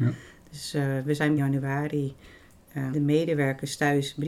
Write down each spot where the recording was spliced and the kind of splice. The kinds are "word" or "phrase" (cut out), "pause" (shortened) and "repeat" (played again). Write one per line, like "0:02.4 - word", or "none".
0:01.4 - phrase
0:02.9 - word

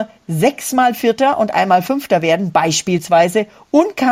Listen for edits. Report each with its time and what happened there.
none

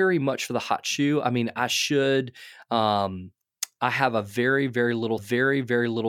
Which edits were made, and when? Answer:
0:05.2 - repeat

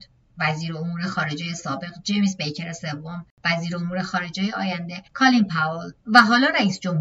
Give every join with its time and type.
0:03.3 - pause
0:05.1 - pause
0:06.0 - pause

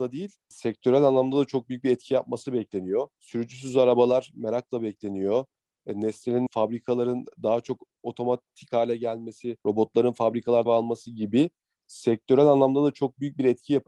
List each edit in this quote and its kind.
0:03.1 - pause
0:06.5 - word
0:09.6 - pause
0:10.7 - word

